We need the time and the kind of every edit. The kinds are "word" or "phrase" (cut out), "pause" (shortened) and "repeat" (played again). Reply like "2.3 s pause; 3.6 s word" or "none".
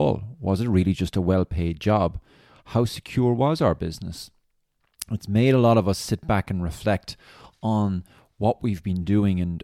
none